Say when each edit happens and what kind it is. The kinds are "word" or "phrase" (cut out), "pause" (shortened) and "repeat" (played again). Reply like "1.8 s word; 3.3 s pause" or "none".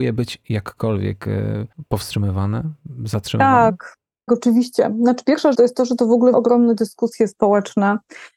4.3 s word; 5.5 s word; 6.3 s word